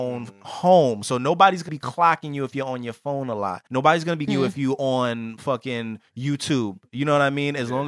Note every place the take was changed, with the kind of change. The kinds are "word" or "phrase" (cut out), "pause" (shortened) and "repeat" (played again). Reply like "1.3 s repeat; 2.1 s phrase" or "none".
1.7 s word; 3.7 s pause; 4.3 s word